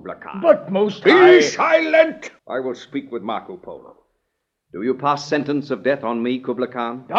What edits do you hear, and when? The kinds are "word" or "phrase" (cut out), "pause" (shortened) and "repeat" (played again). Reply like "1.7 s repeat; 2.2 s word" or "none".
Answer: 2.4 s pause